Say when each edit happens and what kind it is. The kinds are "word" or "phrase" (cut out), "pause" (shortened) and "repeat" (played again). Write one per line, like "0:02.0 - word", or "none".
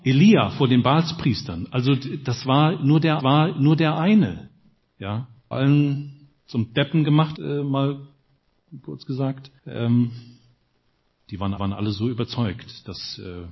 0:03.2 - repeat
0:05.5 - phrase
0:06.4 - pause
0:07.3 - word
0:09.6 - pause
0:11.6 - repeat